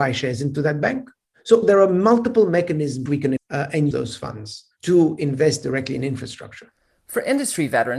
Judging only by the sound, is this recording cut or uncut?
cut